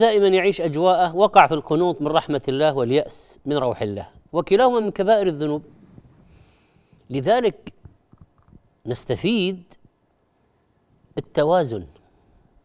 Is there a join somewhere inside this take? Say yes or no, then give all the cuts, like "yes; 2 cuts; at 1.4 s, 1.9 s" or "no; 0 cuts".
no; 0 cuts